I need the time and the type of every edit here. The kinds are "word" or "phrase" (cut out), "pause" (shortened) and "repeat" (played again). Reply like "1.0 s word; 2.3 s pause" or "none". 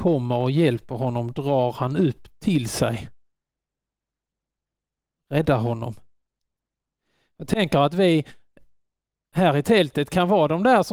none